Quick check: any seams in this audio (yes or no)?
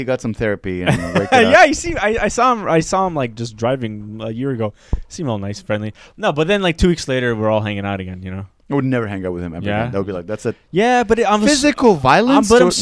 no